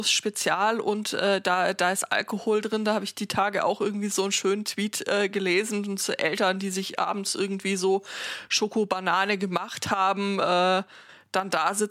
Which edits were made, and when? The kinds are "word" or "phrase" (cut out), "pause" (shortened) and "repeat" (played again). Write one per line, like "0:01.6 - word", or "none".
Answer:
none